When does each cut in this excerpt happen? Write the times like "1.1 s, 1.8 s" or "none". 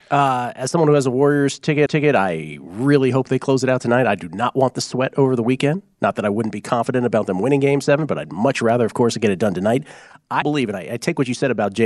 1.9 s, 10.4 s